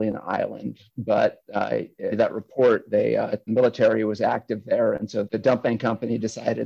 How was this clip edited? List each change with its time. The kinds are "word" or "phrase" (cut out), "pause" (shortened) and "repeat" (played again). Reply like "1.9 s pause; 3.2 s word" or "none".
2.1 s word; 3.5 s word; 5.2 s word

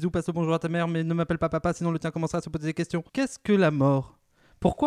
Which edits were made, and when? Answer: 3.1 s pause

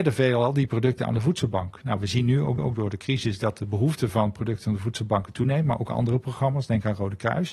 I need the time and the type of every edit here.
2.6 s repeat

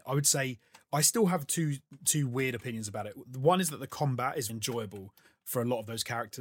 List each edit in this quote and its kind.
4.5 s word

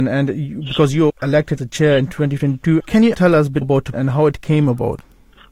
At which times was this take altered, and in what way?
1.1 s word; 1.6 s word; 2.8 s word; 3.1 s word; 3.6 s word; 3.9 s word

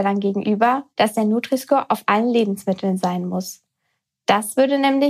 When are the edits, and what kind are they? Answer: 0.9 s pause

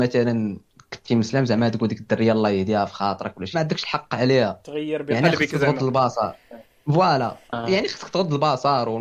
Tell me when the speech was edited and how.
3.5 s phrase; 6.6 s pause; 7.4 s pause

